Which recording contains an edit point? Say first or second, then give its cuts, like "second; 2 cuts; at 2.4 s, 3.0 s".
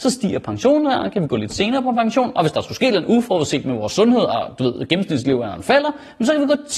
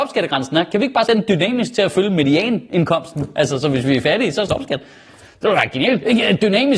second; 2 cuts; at 1.1 s, 4.5 s